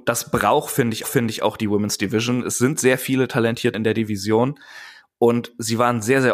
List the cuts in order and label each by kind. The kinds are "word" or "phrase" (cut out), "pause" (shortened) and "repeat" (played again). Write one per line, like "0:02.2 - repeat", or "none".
0:01.0 - repeat
0:03.7 - word